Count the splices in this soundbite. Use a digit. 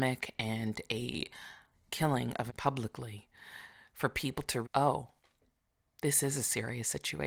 3